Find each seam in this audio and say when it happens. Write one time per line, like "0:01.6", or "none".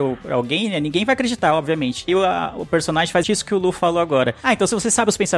0:02.1
0:03.2

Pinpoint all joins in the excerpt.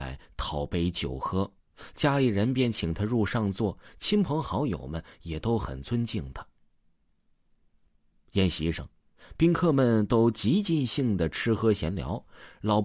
0:01.6

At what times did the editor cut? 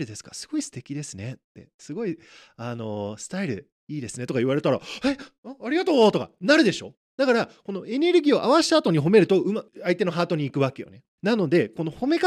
0:11.1

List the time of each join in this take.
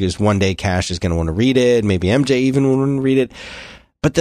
none

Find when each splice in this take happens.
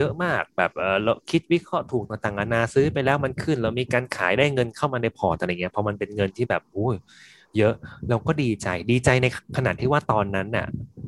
none

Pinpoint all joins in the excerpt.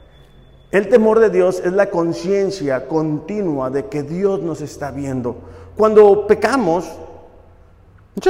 none

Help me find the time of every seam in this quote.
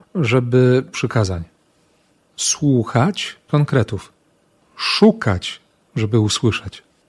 0:00.9
0:03.5

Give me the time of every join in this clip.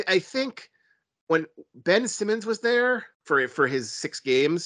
0:03.1

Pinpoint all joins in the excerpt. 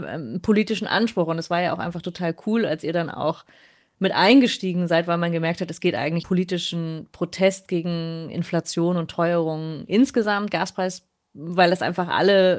0:06.2

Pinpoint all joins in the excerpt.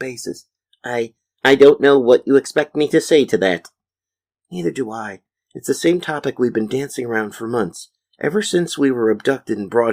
none

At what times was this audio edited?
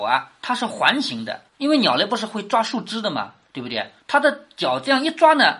0:01.5
0:04.0

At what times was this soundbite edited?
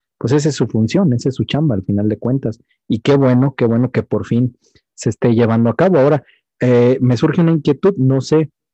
none

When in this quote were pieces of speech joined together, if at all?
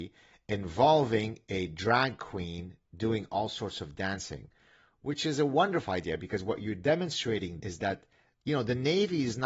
0:07.6

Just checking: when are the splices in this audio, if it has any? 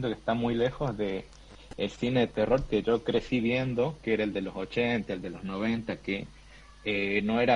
none

